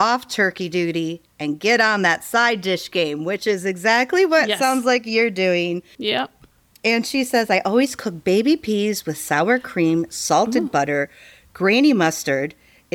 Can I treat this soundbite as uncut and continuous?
yes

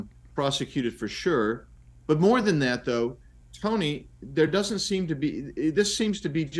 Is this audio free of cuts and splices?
yes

